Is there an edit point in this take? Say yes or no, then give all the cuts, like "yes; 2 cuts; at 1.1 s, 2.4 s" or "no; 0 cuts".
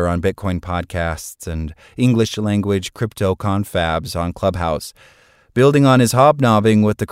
no; 0 cuts